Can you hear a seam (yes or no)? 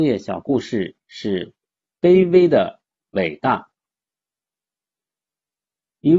no